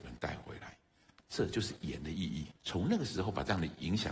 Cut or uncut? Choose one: cut